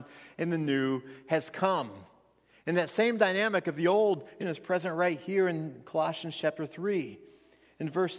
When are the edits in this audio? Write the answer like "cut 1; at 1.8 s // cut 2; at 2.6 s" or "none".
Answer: cut 1; at 4.4 s